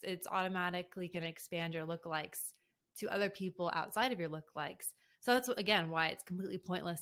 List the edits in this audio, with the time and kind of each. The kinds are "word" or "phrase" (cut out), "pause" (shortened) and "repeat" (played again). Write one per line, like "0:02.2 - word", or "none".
none